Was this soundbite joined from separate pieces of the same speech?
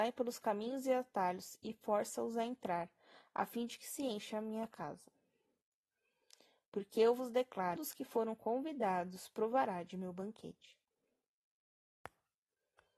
yes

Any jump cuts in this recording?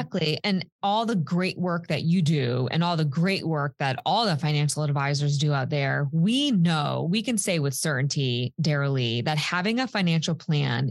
no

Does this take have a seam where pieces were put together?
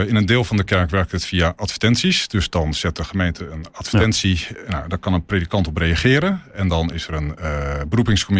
no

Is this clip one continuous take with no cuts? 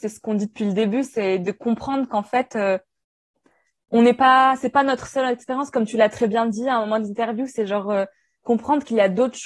yes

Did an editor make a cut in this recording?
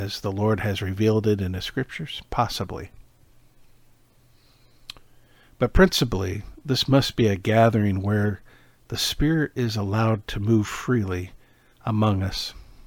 no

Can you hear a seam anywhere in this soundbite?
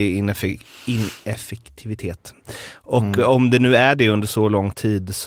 no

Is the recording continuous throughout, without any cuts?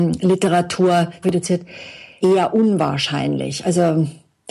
no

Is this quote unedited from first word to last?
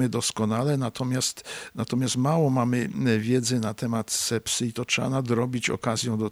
yes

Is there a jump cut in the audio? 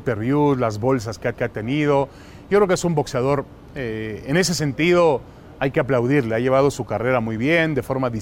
yes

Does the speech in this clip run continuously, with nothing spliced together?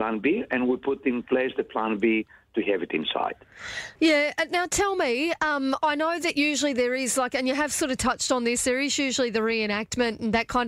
no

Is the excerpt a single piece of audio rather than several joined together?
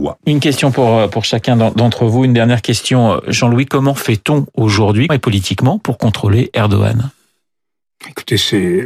no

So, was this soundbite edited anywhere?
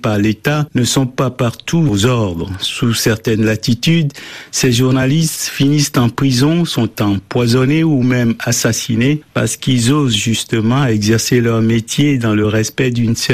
no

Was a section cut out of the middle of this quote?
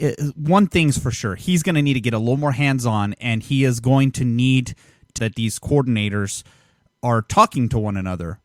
yes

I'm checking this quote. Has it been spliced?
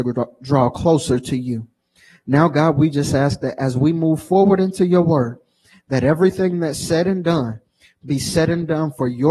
no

